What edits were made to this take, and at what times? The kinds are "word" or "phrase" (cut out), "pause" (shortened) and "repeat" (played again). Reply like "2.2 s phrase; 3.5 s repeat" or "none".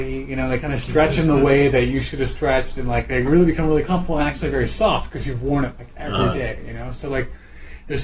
none